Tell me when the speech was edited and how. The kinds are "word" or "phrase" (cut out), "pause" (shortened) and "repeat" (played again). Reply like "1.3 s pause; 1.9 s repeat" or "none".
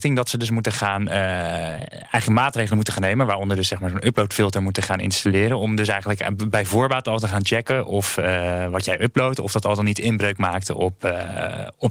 none